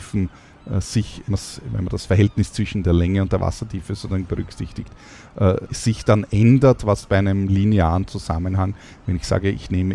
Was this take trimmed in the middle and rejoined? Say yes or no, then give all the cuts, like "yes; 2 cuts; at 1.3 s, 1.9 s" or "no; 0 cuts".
yes; 2 cuts; at 1.3 s, 5.7 s